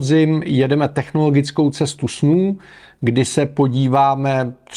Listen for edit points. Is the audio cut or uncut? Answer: uncut